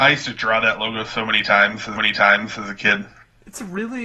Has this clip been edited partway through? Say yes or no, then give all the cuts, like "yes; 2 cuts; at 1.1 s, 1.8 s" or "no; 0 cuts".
yes; 1 cut; at 2.0 s